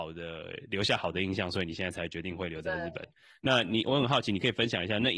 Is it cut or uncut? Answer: uncut